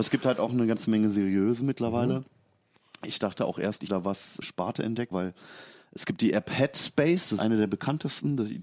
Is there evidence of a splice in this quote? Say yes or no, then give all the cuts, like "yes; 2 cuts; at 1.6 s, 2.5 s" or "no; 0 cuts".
yes; 4 cuts; at 3.9 s, 4.4 s, 5.1 s, 7.4 s